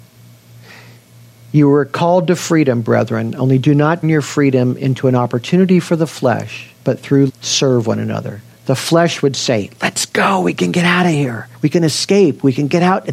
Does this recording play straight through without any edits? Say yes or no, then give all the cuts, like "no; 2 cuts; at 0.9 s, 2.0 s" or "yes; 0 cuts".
no; 4 cuts; at 4.0 s, 6.8 s, 7.3 s, 11.5 s